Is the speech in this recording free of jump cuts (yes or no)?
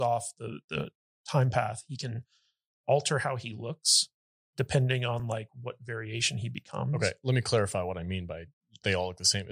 yes